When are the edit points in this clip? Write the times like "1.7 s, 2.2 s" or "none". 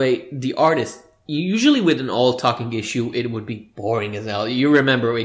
none